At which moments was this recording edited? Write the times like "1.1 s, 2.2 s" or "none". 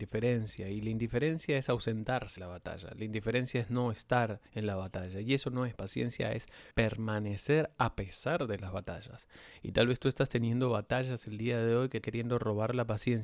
2.4 s, 4.5 s, 5.8 s, 6.7 s, 12.0 s